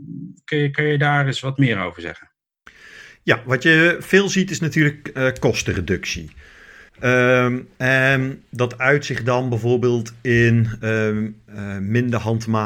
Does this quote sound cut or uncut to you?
cut